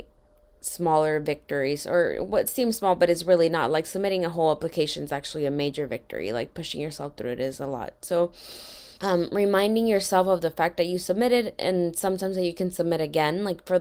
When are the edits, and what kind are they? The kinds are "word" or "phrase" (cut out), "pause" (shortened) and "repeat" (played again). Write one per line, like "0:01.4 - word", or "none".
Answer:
0:09.0 - pause